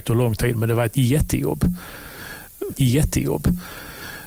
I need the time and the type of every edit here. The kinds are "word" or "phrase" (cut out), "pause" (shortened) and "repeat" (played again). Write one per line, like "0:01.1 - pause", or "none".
0:02.7 - repeat